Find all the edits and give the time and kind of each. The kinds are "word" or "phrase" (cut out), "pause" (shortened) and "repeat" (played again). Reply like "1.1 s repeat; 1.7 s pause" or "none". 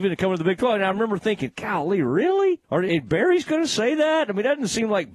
2.6 s pause